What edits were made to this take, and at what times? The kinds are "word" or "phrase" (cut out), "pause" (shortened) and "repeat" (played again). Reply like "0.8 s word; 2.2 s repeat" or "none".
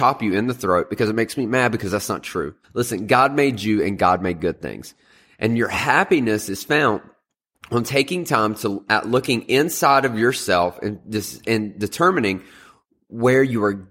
2.6 s pause